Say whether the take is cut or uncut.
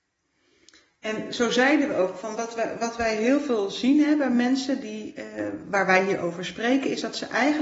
uncut